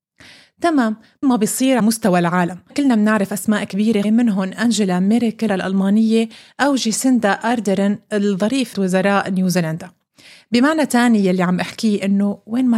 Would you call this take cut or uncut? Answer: cut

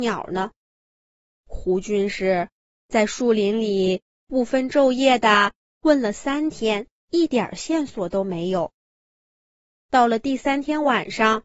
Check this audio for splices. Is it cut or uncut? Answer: cut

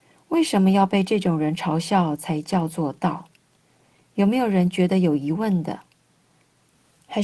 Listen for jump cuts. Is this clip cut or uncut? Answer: uncut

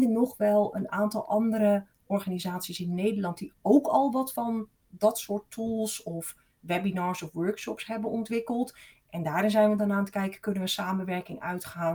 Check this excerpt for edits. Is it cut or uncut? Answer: uncut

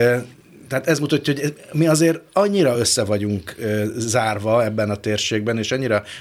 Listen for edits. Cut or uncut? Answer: uncut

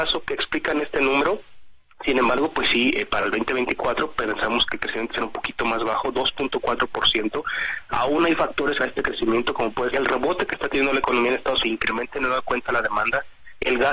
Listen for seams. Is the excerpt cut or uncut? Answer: cut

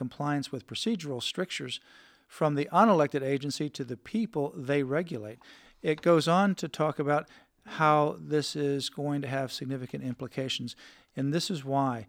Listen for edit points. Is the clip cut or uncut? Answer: uncut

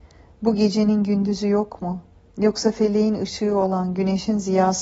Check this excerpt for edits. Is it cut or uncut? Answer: uncut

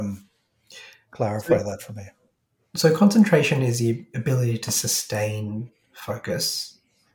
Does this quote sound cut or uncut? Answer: uncut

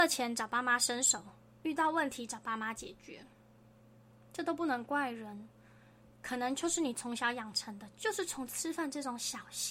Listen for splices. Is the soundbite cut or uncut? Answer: uncut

